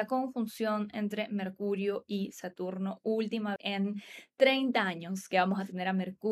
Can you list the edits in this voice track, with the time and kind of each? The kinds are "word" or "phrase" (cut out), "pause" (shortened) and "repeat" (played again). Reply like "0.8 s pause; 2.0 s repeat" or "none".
3.6 s word